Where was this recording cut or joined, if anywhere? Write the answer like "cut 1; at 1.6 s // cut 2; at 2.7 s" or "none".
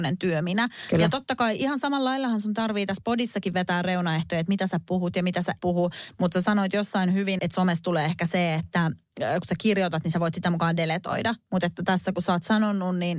cut 1; at 5.6 s // cut 2; at 7.4 s